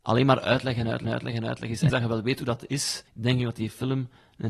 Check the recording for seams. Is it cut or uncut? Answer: cut